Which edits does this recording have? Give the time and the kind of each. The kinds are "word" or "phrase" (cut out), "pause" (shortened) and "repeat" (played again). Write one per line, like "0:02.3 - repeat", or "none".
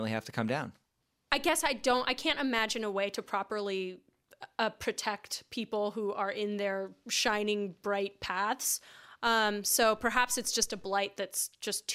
none